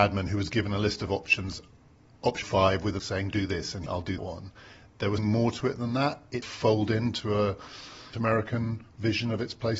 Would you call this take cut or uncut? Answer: cut